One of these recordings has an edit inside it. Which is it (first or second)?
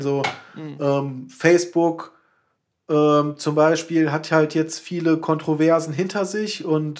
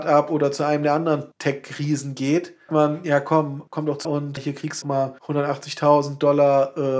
second